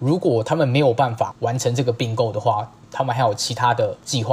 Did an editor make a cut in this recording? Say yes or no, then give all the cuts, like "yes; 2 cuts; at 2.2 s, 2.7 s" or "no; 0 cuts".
no; 0 cuts